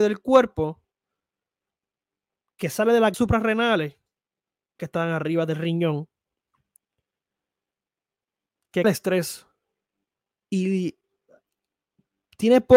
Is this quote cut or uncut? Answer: cut